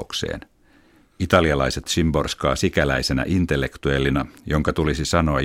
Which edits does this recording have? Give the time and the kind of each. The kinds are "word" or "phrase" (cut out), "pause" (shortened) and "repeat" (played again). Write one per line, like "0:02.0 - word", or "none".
0:01.9 - word